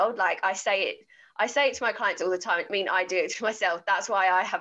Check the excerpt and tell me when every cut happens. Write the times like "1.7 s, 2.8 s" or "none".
2.7 s